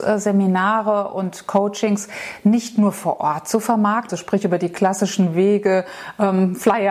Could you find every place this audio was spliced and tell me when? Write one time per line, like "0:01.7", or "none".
0:04.1